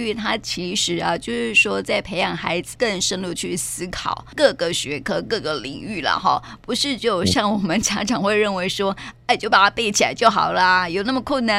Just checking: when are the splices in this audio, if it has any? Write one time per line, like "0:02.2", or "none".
0:02.7